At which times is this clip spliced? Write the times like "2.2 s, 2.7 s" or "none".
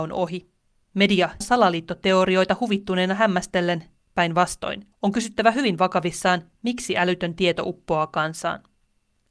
1.4 s, 4.9 s